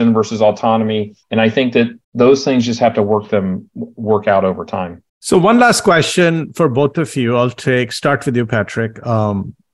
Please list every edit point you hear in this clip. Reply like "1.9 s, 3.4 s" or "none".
1.2 s, 2.0 s, 5.1 s